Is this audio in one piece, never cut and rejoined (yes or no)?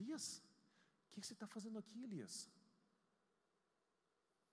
yes